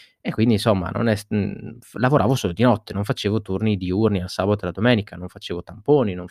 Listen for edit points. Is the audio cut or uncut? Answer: uncut